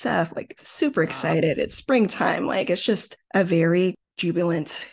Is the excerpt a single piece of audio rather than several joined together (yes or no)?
no